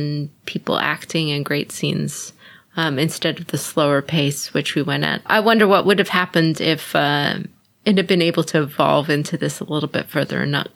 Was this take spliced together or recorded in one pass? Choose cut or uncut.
uncut